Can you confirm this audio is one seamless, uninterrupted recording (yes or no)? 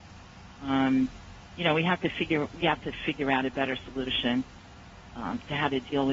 no